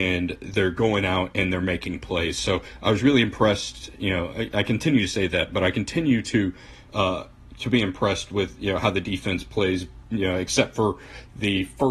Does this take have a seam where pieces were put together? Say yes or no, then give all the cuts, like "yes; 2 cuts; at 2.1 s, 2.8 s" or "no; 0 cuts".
no; 0 cuts